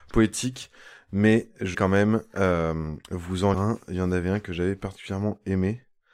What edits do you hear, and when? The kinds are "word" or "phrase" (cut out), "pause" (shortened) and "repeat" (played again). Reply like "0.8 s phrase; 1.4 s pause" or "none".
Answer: 1.7 s word; 3.0 s pause; 3.5 s word